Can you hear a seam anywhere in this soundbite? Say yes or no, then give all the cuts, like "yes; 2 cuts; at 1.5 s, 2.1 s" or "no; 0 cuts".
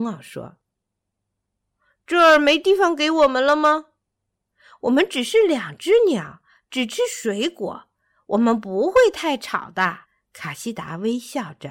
yes; 1 cut; at 10.0 s